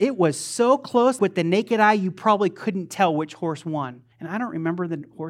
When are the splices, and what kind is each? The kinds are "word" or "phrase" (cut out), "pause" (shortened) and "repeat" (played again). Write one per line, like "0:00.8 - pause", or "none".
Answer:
0:01.2 - word
0:04.1 - pause

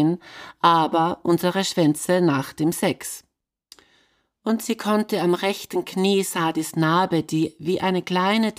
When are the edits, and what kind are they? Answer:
none

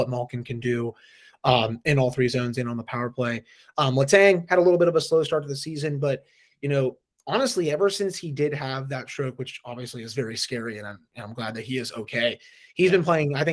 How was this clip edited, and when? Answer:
none

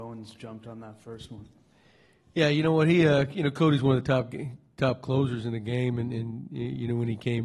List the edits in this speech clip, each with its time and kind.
none

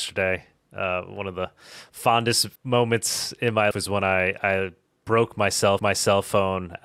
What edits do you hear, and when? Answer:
0:02.6 - pause
0:03.7 - word
0:05.8 - repeat

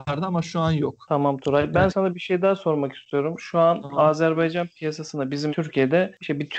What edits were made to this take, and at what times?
0:01.9 - word
0:05.5 - word

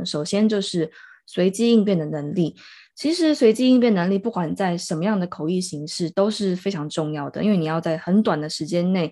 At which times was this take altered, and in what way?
none

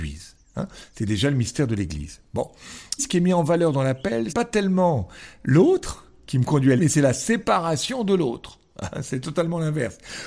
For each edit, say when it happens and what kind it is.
0:03.0 - word
0:04.3 - word
0:06.8 - word

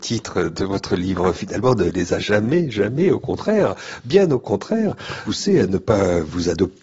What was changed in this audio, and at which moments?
0:02.2 - word

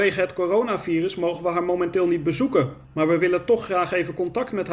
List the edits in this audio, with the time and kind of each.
0:02.8 - pause

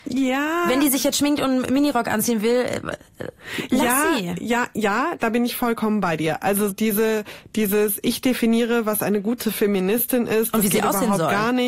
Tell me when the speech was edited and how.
0:06.7 - word

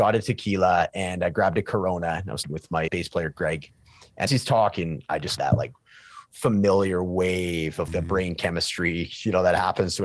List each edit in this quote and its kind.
0:02.4 - word
0:02.9 - word
0:04.3 - word
0:05.4 - word
0:07.9 - word

